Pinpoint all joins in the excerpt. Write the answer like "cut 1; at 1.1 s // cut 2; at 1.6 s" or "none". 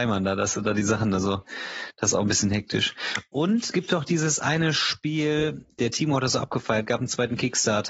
cut 1; at 3.7 s